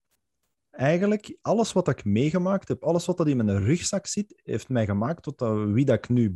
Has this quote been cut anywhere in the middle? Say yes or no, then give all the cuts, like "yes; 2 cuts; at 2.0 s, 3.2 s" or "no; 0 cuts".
no; 0 cuts